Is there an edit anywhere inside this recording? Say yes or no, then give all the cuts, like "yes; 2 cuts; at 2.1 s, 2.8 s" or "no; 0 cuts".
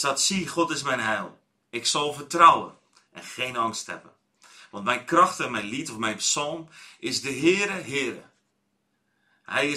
no; 0 cuts